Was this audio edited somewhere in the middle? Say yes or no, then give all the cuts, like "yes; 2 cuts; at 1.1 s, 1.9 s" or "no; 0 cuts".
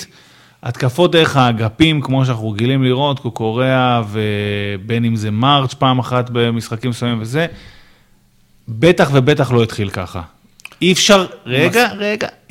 no; 0 cuts